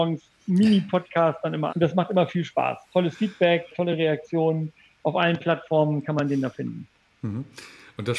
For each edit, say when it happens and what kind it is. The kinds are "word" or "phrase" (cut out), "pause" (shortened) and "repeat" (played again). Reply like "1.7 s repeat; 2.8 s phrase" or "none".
1.7 s word; 3.7 s word